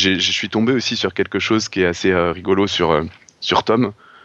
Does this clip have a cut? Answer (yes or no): no